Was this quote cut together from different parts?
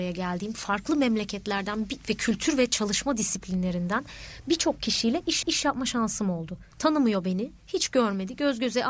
yes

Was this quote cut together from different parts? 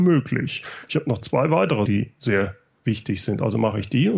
yes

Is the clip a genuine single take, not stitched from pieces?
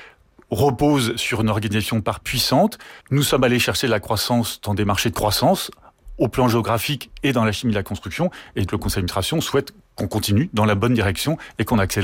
no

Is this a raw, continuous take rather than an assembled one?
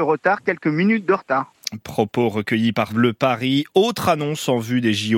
no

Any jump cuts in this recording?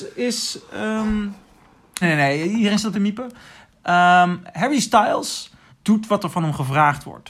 yes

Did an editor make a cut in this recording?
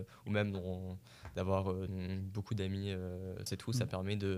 yes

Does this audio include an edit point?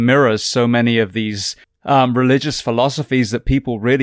yes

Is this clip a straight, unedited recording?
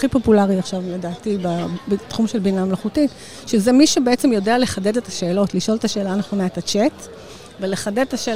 yes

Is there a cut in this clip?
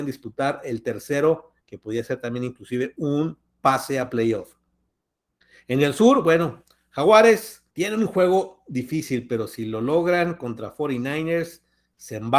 yes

